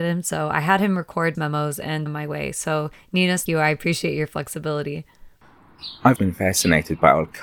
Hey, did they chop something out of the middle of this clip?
yes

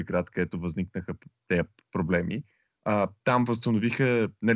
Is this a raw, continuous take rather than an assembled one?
yes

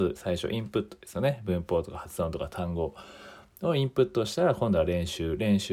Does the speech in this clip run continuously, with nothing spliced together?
yes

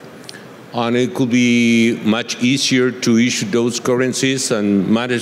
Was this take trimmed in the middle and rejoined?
no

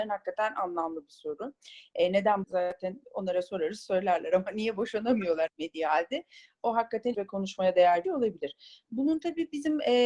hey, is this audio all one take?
no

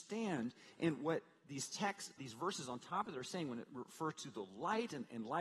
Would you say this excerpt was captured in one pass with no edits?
no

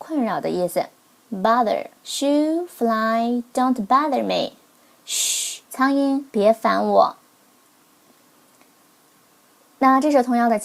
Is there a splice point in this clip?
yes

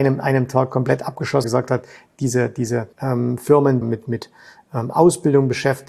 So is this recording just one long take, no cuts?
no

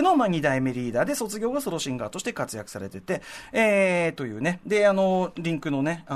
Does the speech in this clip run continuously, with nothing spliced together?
yes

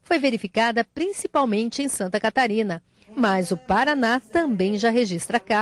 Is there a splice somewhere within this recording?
no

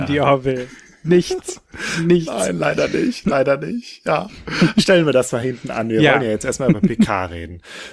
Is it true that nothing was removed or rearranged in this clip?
yes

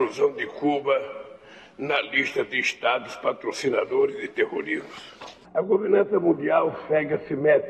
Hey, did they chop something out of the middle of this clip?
no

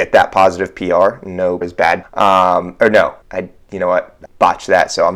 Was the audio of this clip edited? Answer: yes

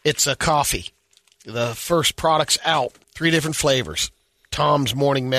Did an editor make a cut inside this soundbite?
yes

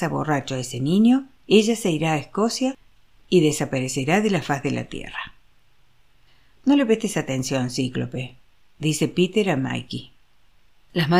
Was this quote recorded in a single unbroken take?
yes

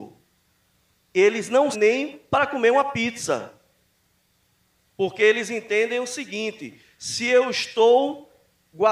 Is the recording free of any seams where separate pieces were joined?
no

